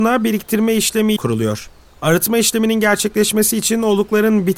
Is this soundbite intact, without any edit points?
no; 1 cut; at 1.2 s

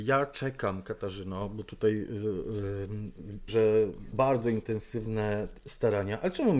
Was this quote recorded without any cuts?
no; 2 cuts; at 3.5 s, 4.1 s

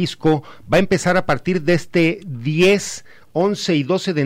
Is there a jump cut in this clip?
no; 0 cuts

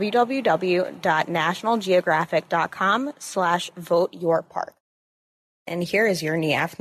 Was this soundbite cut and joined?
no; 0 cuts

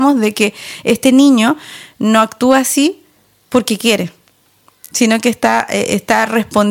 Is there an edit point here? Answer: no; 0 cuts

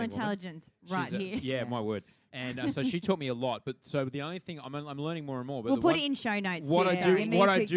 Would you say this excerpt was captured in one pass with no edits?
yes; 0 cuts

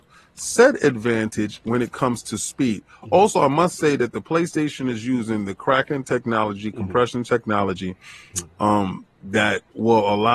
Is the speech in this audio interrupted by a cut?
no; 0 cuts

